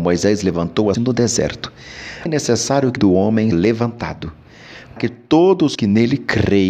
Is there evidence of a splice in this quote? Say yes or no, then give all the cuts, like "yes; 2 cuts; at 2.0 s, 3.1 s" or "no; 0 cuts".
yes; 6 cuts; at 1.0 s, 2.3 s, 3.0 s, 3.5 s, 5.0 s, 5.8 s